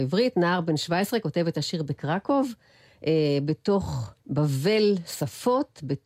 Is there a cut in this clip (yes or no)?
yes